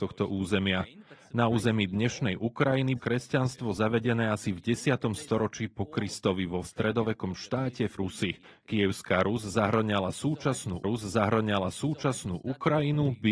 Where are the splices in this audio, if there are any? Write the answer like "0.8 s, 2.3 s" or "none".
3.0 s, 6.6 s, 8.0 s, 8.4 s, 10.8 s